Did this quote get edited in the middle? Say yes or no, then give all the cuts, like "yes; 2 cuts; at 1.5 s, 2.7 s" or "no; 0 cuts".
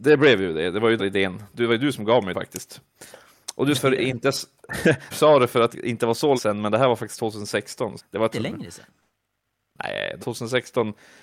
yes; 9 cuts; at 1.0 s, 2.3 s, 3.7 s, 5.1 s, 5.7 s, 6.4 s, 8.0 s, 8.3 s, 10.2 s